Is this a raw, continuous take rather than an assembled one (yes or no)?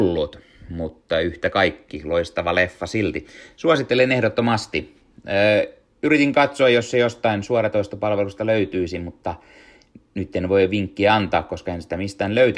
yes